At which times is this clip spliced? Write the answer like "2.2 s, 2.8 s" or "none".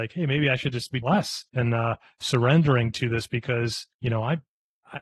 1.0 s, 1.5 s, 3.9 s